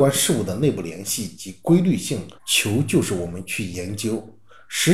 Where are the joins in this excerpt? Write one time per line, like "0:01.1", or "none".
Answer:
0:02.4

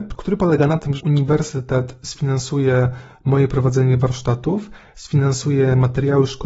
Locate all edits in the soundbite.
0:01.0

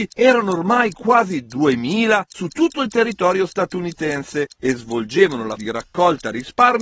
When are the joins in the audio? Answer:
0:05.6

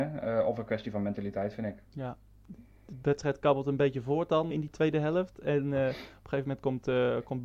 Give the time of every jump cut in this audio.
0:04.5

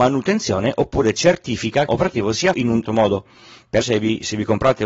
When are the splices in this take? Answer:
0:01.9
0:02.5
0:02.9
0:03.8

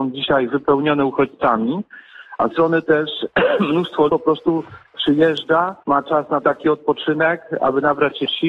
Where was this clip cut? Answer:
0:02.5
0:04.1
0:05.8
0:06.4

